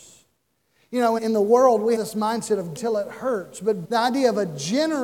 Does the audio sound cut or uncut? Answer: cut